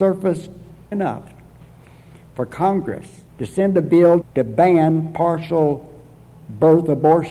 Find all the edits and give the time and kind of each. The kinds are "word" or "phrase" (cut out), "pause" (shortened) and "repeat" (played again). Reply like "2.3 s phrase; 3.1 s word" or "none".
0.9 s word; 3.3 s pause; 4.2 s phrase